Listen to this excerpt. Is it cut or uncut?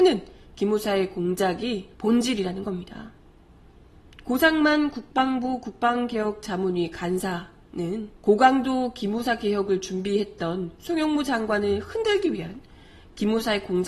cut